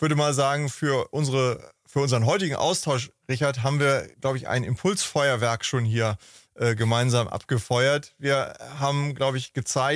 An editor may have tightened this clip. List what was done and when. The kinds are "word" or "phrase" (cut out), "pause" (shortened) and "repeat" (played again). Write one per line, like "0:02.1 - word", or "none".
0:01.8 - pause
0:04.1 - pause